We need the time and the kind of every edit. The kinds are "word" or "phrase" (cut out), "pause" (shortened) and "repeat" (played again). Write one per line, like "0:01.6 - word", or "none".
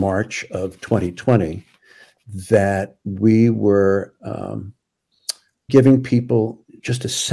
0:05.7 - word